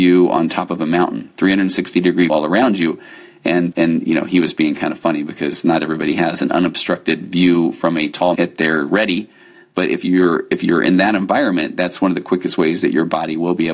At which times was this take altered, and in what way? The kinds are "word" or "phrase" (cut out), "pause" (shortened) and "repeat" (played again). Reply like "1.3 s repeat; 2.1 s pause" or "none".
2.3 s word; 3.7 s word; 8.3 s word